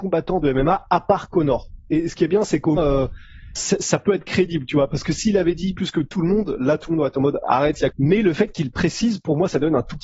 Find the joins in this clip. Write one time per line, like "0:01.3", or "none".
0:02.8
0:03.5
0:05.7
0:07.9